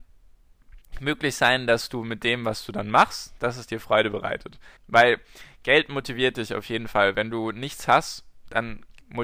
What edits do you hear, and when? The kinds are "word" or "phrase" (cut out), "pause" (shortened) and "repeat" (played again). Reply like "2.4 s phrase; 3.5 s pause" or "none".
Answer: 4.8 s pause